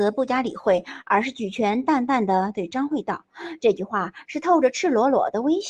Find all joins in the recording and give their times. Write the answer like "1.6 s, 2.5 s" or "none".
none